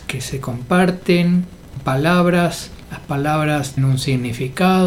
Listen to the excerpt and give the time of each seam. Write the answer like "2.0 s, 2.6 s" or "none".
1.8 s, 3.8 s